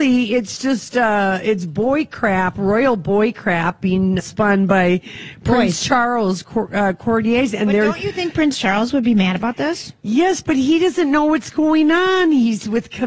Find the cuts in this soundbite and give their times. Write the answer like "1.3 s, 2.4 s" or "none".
4.2 s

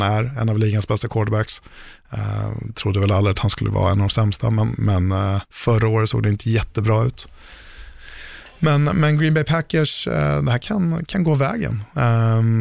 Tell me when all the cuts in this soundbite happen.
5.5 s

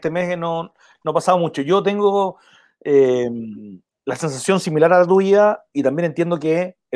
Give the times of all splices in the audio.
none

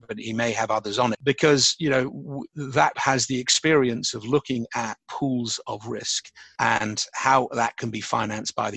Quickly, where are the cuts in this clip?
1.1 s, 2.9 s

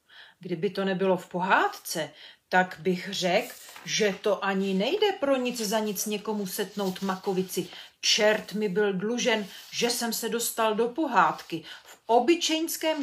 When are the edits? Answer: none

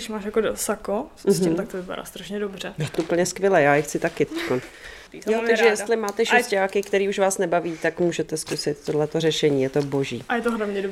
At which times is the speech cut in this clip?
2.9 s, 5.1 s

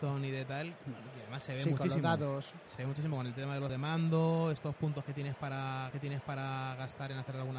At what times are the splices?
3.7 s, 5.9 s

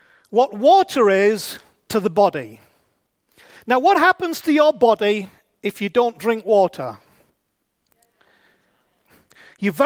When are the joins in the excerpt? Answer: none

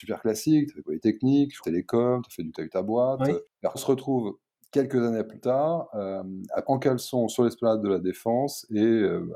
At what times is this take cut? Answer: 1.6 s, 2.5 s, 3.7 s, 5.4 s, 6.6 s

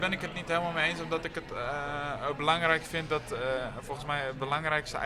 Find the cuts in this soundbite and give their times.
none

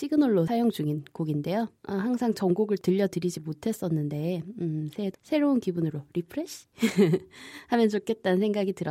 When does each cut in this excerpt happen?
1.8 s, 5.1 s

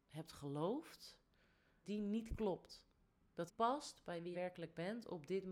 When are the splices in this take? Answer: 1.8 s, 3.5 s, 4.3 s

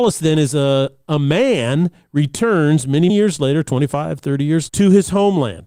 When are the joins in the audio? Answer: 3.1 s, 4.7 s

